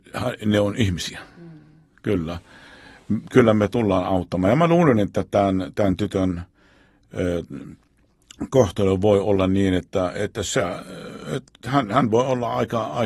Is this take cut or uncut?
uncut